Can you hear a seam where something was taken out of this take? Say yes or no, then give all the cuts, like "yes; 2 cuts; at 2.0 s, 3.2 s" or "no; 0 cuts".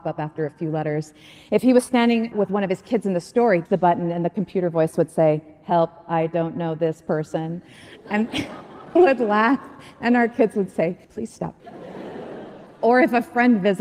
yes; 5 cuts; at 2.3 s, 3.7 s, 9.0 s, 11.0 s, 11.6 s